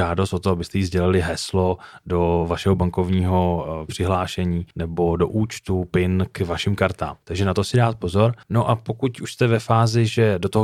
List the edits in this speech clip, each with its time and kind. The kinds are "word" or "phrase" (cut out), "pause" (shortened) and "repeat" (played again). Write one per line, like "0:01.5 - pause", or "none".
0:04.7 - pause
0:07.2 - pause
0:08.4 - pause